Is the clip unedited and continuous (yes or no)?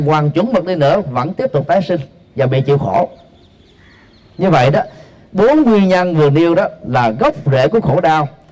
yes